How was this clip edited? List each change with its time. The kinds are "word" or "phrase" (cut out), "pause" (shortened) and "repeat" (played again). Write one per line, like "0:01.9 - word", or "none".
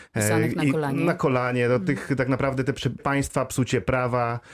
0:03.0 - word